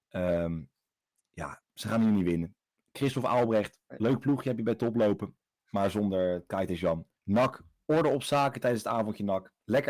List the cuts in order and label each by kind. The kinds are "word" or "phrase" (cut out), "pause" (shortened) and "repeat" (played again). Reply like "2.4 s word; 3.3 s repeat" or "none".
7.2 s pause